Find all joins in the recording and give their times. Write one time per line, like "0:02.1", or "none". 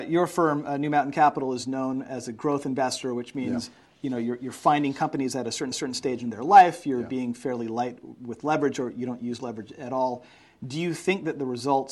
0:05.7